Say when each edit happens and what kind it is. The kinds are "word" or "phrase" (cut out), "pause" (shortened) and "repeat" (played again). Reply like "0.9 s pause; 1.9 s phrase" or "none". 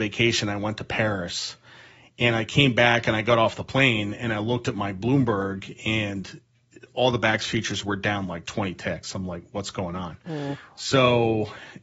none